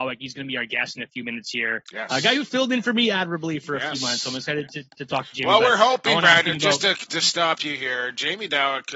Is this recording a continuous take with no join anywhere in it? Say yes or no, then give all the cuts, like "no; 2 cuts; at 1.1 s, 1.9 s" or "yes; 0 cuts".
yes; 0 cuts